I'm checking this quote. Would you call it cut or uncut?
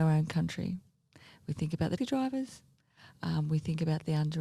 cut